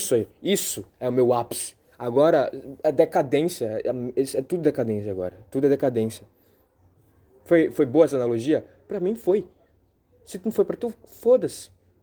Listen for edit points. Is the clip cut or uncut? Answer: uncut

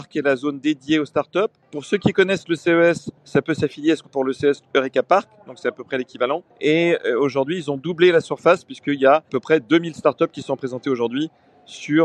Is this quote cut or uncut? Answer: cut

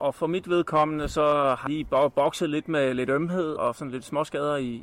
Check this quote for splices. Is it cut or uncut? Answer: cut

